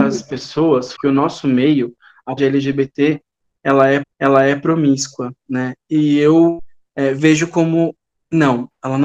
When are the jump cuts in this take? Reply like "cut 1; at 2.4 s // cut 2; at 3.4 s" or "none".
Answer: cut 1; at 0.9 s // cut 2; at 2.4 s // cut 3; at 4.0 s